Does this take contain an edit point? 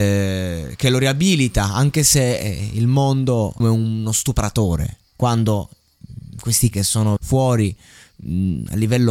yes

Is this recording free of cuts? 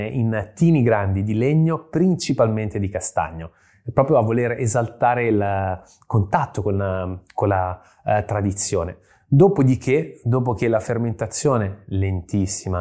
yes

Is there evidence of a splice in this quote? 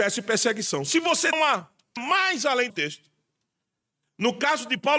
yes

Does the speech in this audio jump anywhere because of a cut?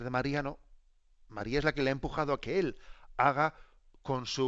no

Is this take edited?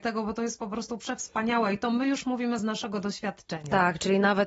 no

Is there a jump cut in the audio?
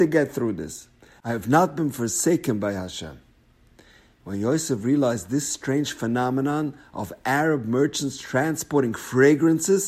no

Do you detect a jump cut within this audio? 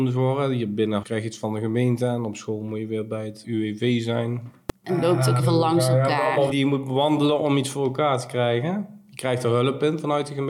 yes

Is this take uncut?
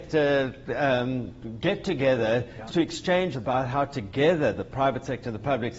no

